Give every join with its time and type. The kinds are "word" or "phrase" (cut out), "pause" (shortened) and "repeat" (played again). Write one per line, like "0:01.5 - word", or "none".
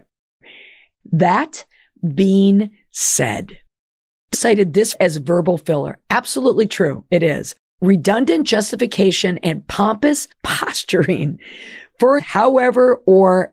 0:04.3 - word
0:04.9 - word
0:07.6 - pause
0:10.3 - pause
0:12.2 - word

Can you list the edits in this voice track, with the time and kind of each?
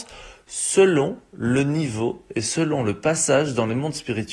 none

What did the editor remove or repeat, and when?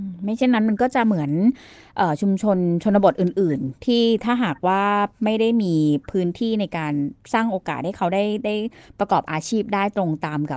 none

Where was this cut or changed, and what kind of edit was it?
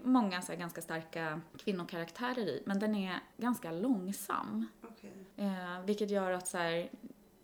0:01.5 - pause
0:03.3 - pause
0:05.3 - pause

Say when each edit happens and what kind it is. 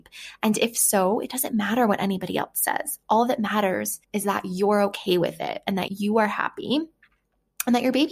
0:04.0 - pause
0:05.9 - word

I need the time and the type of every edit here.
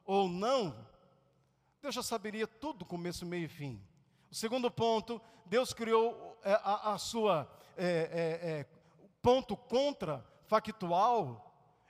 none

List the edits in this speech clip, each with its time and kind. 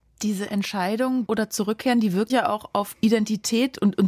0:01.3 - word
0:02.3 - word
0:03.0 - word

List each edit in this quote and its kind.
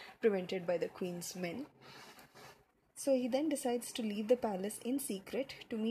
0:02.7 - pause

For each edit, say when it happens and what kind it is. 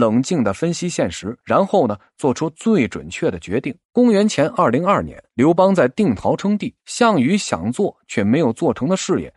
0:01.4 - pause
0:03.8 - pause
0:05.3 - pause
0:06.8 - pause

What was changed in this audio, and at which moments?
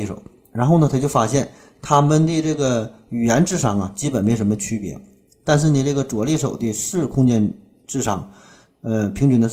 none

